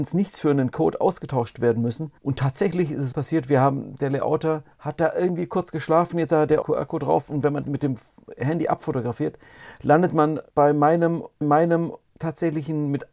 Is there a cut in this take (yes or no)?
yes